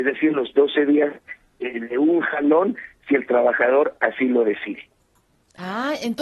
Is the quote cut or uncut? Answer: uncut